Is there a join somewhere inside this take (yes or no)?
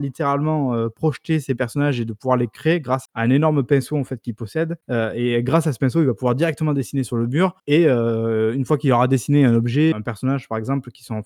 yes